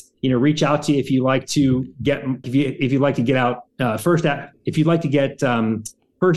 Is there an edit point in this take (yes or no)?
yes